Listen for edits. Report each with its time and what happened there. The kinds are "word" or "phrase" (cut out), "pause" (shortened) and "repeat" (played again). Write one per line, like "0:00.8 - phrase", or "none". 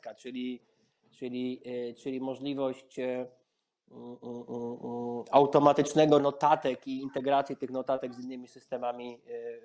0:06.2 - word